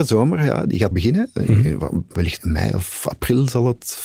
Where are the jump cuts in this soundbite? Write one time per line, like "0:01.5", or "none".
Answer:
0:00.9
0:02.4